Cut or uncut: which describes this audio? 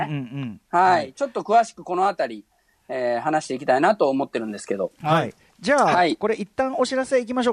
uncut